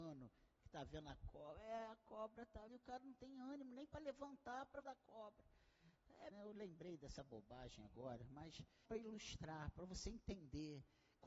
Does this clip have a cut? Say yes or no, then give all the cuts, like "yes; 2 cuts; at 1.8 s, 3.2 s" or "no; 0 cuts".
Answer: yes; 4 cuts; at 2.7 s, 4.8 s, 6.3 s, 8.9 s